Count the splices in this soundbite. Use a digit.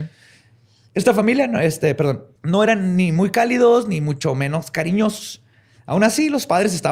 1